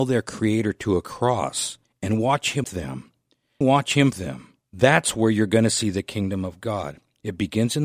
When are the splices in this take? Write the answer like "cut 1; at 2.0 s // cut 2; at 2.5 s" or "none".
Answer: cut 1; at 1.8 s // cut 2; at 2.6 s // cut 3; at 3.6 s // cut 4; at 4.1 s // cut 5; at 4.6 s